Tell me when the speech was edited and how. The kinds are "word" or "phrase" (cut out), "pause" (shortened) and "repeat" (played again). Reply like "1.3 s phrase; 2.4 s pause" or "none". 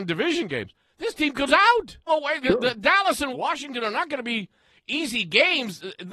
1.5 s word; 2.1 s word; 3.3 s word